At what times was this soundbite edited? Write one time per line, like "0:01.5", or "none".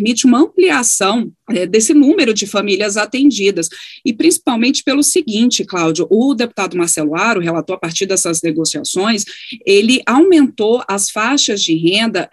0:01.7

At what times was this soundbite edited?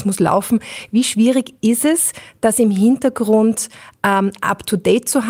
none

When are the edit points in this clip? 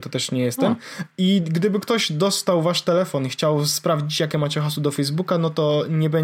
none

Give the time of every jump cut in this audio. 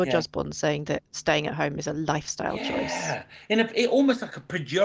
none

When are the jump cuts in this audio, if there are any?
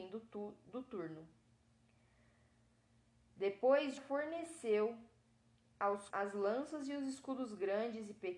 0:04.0
0:06.1

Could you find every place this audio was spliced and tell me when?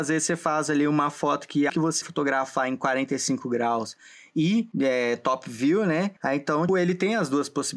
0:01.7
0:02.0
0:04.7
0:06.2
0:06.7

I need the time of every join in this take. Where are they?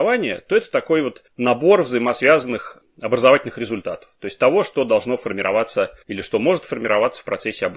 0:01.3
0:06.0

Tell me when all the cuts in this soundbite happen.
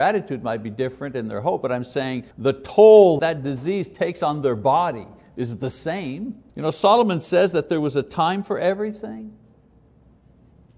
0:02.3
0:03.2
0:06.5

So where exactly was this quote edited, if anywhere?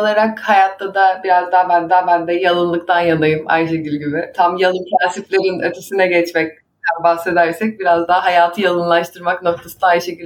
0:01.9

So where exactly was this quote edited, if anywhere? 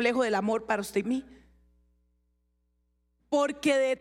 0:01.0

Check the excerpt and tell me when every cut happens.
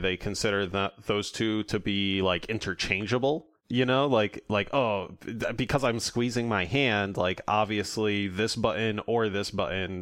none

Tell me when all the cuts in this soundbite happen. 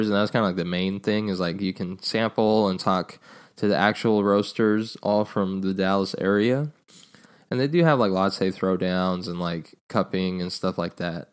none

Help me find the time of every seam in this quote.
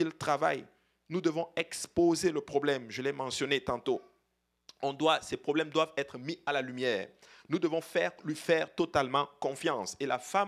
none

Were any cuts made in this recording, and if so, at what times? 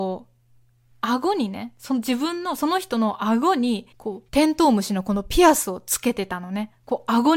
0:03.9
0:04.3

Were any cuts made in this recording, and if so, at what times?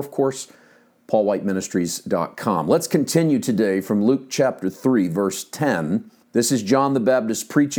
0:06.2

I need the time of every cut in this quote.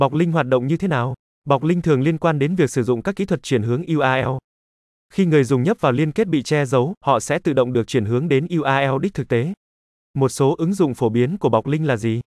none

